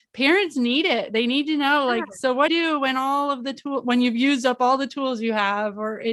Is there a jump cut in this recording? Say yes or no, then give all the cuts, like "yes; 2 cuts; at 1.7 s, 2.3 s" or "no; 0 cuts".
yes; 1 cut; at 2.5 s